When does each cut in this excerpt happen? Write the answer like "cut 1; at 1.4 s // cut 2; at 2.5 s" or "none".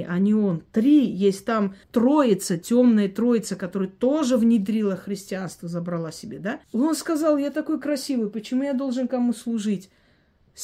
cut 1; at 1.8 s // cut 2; at 6.6 s

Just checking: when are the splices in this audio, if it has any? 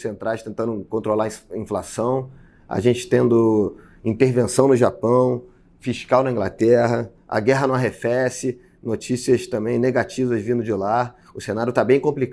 none

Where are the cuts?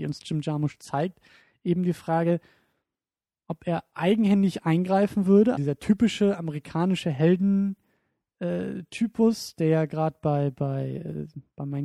cut 1; at 5.6 s

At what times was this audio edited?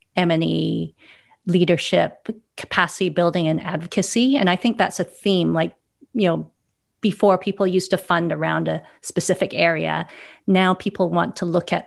none

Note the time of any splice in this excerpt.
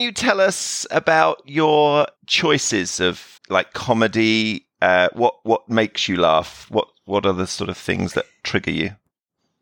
cut 1; at 2.2 s // cut 2; at 3.4 s

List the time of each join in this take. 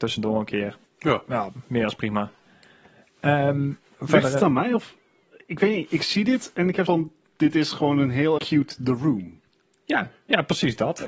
cut 1; at 6.9 s // cut 2; at 8.4 s

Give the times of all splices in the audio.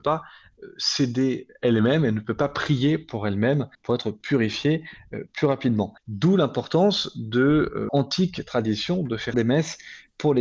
cut 1; at 3.7 s // cut 2; at 6.0 s // cut 3; at 7.9 s // cut 4; at 9.3 s

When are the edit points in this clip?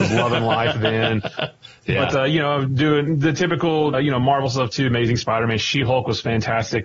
cut 1; at 3.9 s

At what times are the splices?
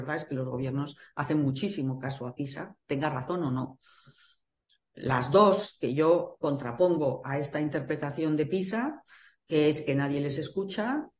none

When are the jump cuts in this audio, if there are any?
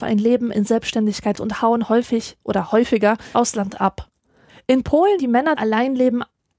cut 1; at 1.3 s // cut 2; at 3.3 s // cut 3; at 4.5 s // cut 4; at 5.2 s // cut 5; at 5.6 s

